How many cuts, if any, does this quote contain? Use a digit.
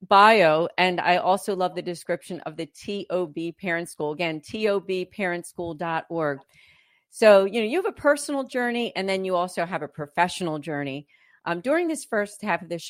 0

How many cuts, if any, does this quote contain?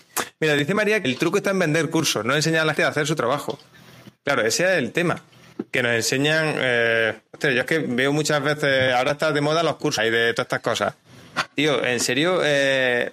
3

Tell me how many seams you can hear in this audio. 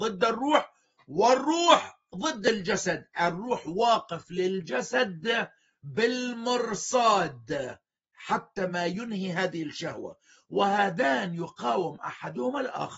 0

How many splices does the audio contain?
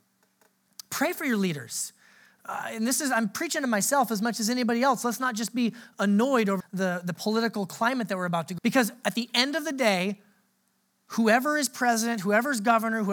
2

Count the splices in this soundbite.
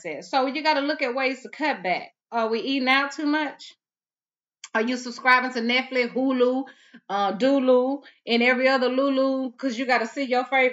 1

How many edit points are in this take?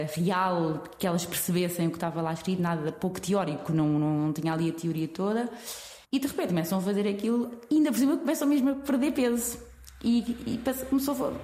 1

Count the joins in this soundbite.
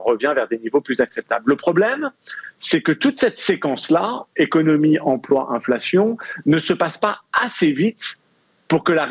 0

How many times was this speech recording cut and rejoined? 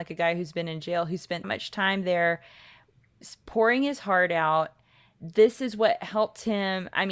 1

